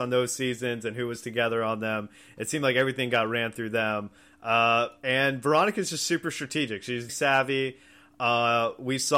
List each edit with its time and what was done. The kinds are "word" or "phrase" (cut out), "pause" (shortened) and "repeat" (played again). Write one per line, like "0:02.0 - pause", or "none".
0:07.1 - word